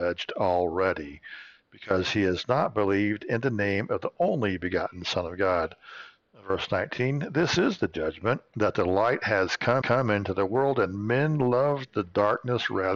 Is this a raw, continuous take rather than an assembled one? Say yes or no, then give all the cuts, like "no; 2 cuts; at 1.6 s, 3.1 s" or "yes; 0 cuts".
no; 1 cut; at 9.8 s